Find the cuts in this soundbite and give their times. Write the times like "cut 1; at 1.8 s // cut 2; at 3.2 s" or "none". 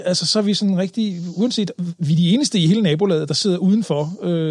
none